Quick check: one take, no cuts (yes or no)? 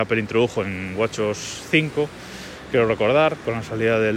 yes